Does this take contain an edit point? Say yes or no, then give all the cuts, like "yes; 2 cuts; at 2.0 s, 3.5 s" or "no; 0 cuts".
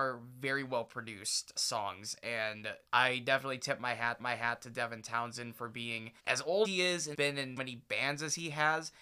yes; 7 cuts; at 1.6 s, 2.9 s, 4.2 s, 6.2 s, 6.6 s, 7.1 s, 7.6 s